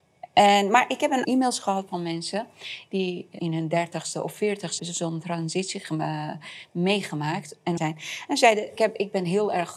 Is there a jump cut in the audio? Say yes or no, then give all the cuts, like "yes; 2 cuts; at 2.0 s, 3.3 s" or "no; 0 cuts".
yes; 5 cuts; at 1.2 s, 3.4 s, 4.8 s, 7.8 s, 8.8 s